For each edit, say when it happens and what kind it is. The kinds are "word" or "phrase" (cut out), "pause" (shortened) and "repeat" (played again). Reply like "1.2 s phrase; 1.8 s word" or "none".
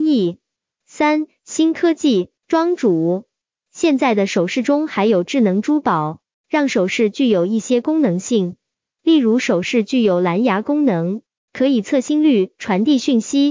2.4 s pause